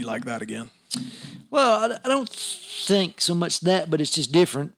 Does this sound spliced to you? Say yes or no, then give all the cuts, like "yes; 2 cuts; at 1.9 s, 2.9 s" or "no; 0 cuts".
no; 0 cuts